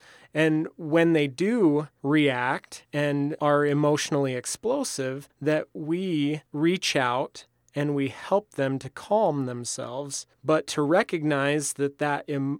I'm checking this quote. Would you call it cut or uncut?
uncut